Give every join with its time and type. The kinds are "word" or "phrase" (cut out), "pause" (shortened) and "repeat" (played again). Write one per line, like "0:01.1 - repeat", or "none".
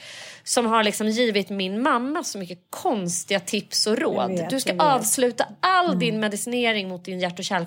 none